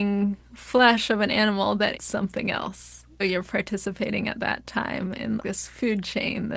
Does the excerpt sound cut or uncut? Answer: cut